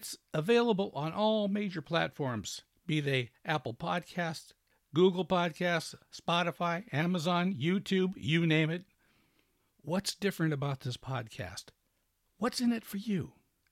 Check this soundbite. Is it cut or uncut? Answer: uncut